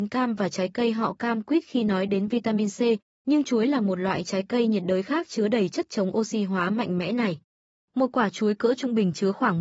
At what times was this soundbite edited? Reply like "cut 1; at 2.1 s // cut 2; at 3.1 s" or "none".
none